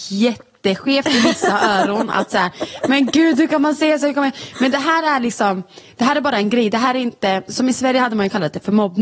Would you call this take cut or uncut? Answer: uncut